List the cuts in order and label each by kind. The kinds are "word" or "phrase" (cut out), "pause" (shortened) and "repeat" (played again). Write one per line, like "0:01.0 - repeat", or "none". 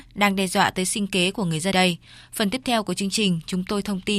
0:01.7 - word